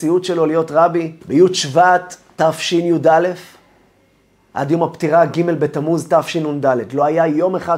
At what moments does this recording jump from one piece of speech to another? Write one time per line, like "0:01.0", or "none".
0:01.2